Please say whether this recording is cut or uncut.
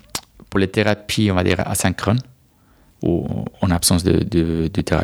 uncut